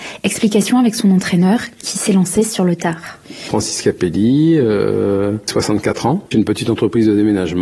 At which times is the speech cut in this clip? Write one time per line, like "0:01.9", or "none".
0:06.3

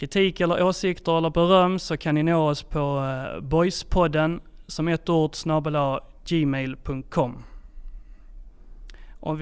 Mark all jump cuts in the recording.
none

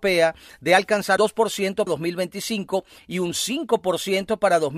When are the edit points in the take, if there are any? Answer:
0:01.2
0:01.9

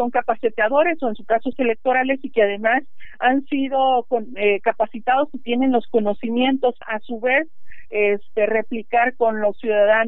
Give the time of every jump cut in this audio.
0:01.5
0:06.8

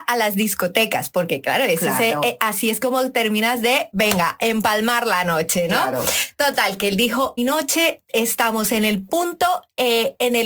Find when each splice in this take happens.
0:07.4

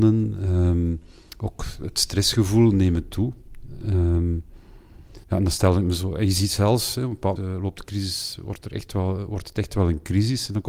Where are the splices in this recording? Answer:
0:05.2
0:07.4

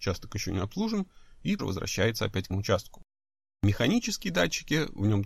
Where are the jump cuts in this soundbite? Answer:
0:01.6
0:02.5

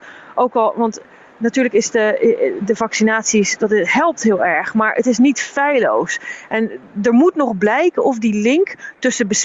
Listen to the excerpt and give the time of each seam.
none

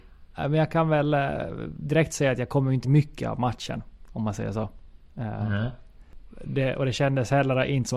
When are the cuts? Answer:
0:02.8

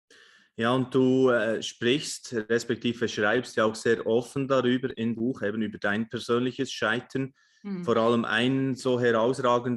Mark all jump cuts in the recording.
0:05.1

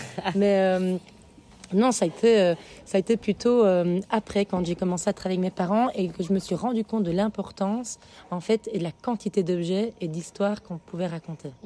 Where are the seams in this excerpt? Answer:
none

